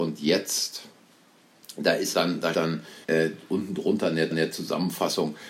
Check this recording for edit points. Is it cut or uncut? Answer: cut